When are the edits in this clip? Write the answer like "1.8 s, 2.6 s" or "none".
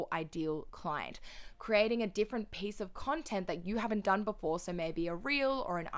none

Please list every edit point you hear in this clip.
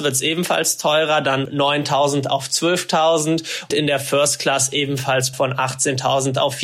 1.5 s, 3.7 s, 5.3 s

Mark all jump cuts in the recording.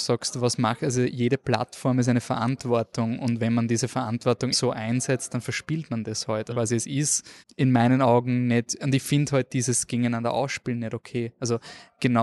4.5 s, 6.5 s, 7.4 s

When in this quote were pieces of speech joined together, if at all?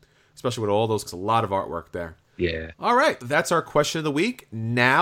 1.1 s, 2.7 s, 3.2 s

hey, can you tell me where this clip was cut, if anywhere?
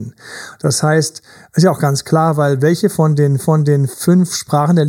3.4 s

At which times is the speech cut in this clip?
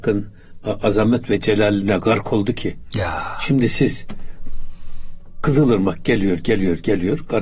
none

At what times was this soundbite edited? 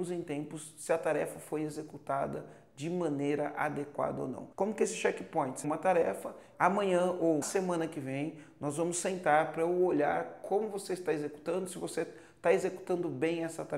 4.5 s, 5.6 s, 6.5 s, 7.4 s

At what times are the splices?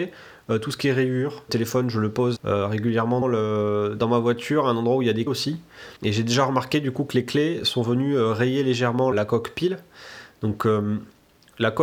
1.5 s, 2.4 s, 3.2 s, 5.3 s, 6.0 s, 9.1 s

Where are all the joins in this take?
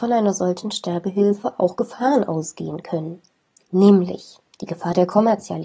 none

